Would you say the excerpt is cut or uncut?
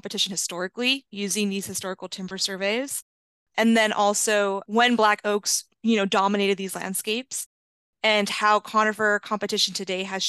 uncut